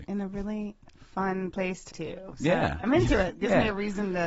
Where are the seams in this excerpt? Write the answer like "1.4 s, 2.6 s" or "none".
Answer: 1.9 s